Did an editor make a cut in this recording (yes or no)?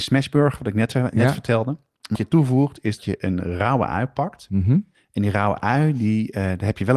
yes